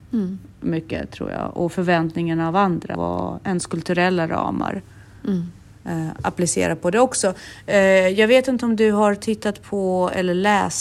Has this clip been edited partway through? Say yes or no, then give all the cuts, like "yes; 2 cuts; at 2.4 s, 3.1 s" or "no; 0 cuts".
yes; 1 cut; at 2.9 s